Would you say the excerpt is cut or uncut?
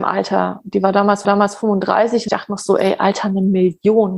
cut